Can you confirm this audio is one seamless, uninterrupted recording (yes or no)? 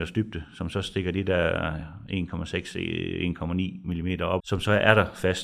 no